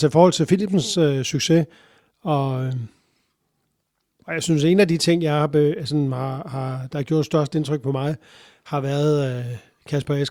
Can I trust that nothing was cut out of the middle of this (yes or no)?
yes